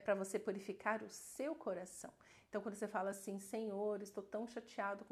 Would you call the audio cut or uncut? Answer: uncut